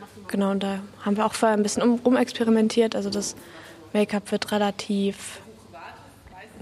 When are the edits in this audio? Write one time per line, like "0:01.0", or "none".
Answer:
none